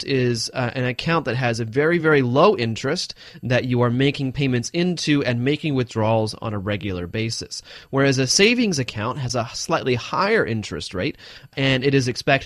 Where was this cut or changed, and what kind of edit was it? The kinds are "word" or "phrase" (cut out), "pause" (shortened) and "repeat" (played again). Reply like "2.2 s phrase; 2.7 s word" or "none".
none